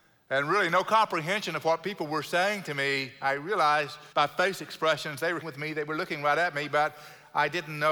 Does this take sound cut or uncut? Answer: cut